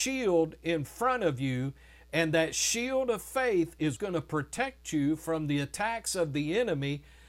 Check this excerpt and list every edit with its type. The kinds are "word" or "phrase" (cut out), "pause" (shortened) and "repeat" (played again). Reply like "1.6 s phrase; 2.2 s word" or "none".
4.0 s word

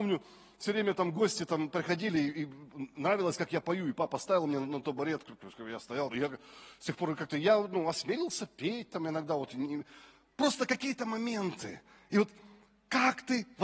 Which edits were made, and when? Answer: 6.1 s phrase

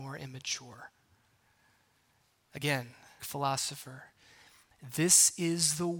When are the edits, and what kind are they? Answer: 3.2 s word

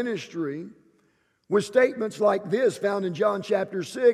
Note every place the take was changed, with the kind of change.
none

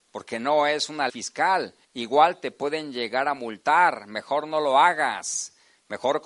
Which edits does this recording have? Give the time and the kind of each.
1.1 s word; 1.8 s pause

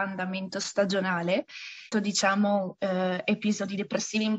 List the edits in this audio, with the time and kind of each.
1.9 s phrase

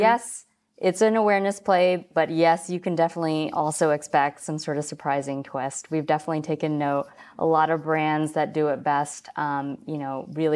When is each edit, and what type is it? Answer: none

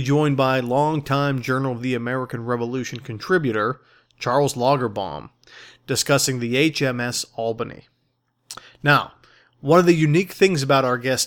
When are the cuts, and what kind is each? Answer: none

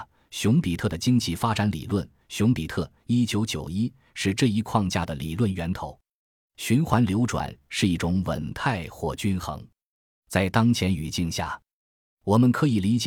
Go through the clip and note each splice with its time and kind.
none

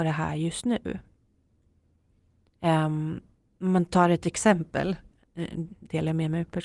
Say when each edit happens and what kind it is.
3.4 s pause

